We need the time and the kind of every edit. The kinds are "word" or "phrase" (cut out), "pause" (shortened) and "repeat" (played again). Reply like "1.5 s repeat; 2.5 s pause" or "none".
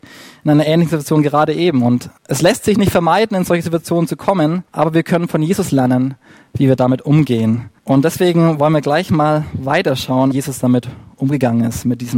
2.2 s pause; 4.7 s pause; 7.8 s pause; 10.3 s phrase